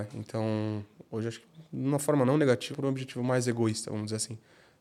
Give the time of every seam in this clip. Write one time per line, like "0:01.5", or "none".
0:02.7

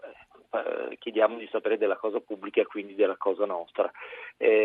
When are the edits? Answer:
none

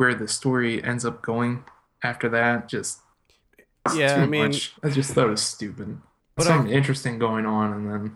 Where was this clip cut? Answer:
0:02.7
0:04.8
0:06.4

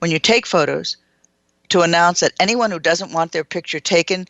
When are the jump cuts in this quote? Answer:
none

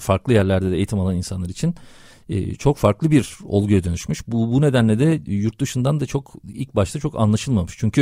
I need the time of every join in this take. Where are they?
none

